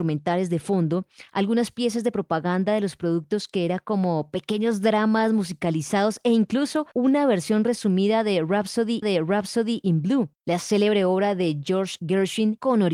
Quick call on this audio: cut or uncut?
cut